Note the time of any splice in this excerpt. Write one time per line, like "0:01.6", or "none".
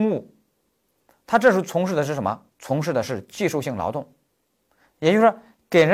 0:02.5